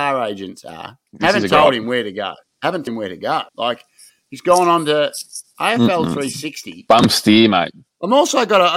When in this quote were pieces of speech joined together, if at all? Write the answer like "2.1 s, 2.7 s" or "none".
1.1 s, 2.9 s, 3.5 s

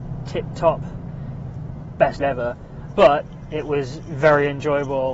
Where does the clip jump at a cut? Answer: 2.2 s, 2.9 s

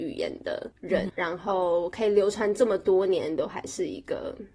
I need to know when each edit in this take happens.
1.1 s

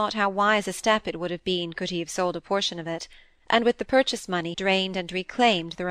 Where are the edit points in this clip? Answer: 4.5 s

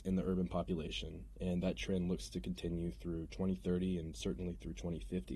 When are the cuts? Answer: none

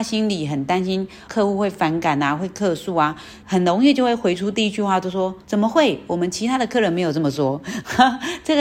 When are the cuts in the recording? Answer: 1.3 s, 3.4 s, 5.4 s

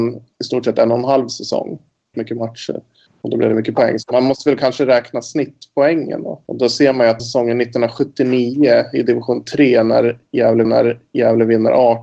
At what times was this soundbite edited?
2.1 s, 6.4 s, 7.2 s, 10.6 s

